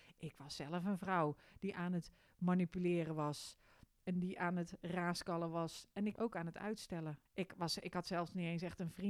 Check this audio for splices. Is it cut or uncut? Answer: cut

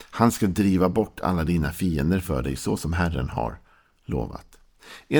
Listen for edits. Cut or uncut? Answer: uncut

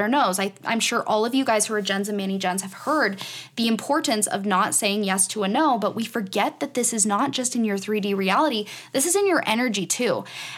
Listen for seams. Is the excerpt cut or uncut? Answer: uncut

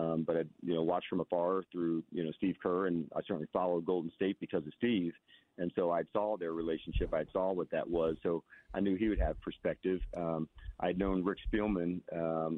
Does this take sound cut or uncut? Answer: uncut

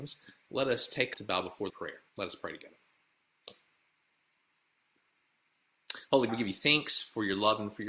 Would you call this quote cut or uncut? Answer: cut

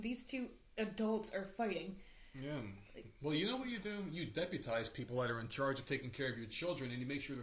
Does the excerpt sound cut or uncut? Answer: uncut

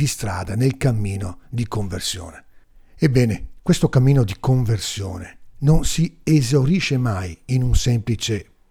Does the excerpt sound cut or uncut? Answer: cut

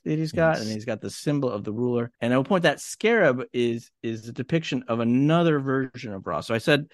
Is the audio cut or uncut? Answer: cut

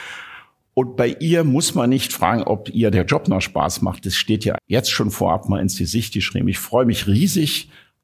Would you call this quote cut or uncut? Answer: cut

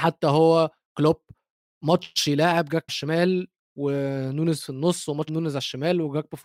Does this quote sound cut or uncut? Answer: cut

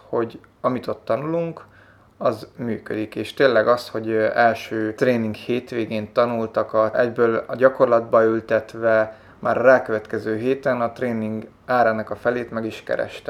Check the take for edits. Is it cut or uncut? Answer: uncut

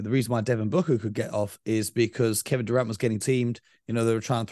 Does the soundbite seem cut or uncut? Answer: cut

